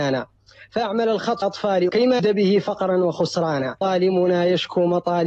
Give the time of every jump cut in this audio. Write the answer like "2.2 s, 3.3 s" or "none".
1.4 s, 1.9 s, 2.2 s, 3.8 s